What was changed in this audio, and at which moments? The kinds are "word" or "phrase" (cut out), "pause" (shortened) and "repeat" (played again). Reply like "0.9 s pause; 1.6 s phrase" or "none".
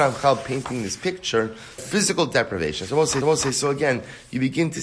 1.8 s word; 3.2 s repeat